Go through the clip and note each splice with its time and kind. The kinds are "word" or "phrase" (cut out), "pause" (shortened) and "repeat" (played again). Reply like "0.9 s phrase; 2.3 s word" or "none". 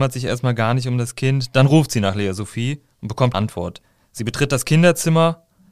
3.3 s word